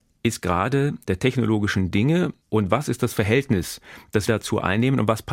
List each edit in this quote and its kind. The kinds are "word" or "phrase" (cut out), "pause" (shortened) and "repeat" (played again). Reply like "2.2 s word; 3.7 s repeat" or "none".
1.0 s word; 2.4 s pause; 4.3 s word